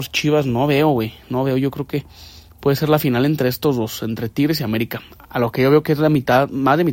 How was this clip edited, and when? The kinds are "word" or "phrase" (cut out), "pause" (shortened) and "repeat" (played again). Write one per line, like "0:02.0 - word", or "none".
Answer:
none